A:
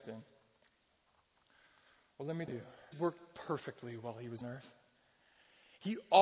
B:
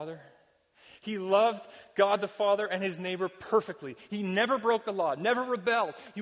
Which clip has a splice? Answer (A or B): A